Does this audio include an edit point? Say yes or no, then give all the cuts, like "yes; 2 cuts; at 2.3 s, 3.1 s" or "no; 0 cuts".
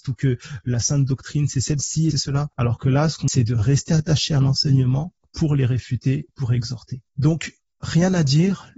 yes; 5 cuts; at 2.1 s, 3.3 s, 5.2 s, 6.3 s, 7.1 s